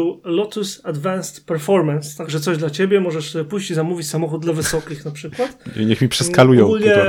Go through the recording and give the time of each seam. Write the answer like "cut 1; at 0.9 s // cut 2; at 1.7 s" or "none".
none